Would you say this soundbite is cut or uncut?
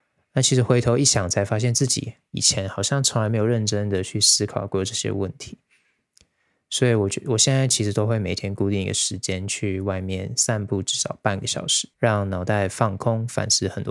cut